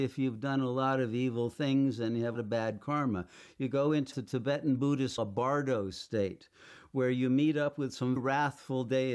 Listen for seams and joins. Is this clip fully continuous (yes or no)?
no